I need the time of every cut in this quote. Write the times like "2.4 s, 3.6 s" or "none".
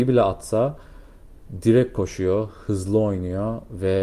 none